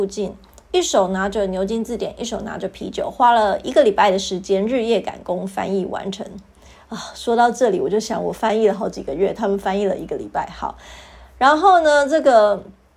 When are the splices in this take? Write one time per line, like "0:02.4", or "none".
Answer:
none